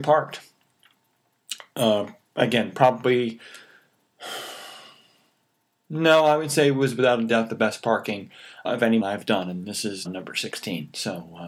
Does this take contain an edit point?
yes; 3 cuts; at 8.6 s, 9.0 s, 10.0 s

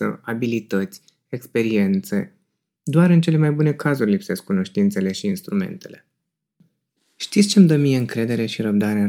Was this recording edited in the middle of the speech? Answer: no; 0 cuts

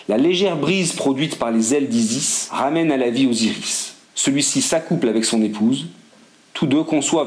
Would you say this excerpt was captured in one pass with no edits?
no; 1 cut; at 4.0 s

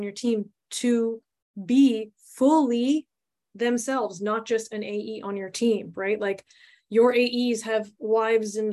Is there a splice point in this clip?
no; 0 cuts

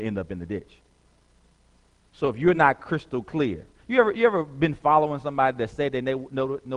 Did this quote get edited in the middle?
no; 0 cuts

